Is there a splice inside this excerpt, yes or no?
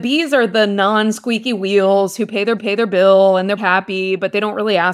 yes